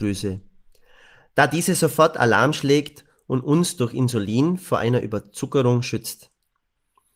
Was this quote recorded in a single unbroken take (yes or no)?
yes